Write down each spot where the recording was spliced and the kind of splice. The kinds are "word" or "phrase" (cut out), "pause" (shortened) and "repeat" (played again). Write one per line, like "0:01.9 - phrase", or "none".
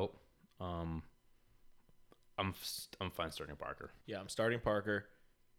0:04.0 - pause